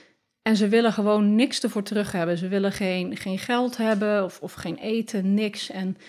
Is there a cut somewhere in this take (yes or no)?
no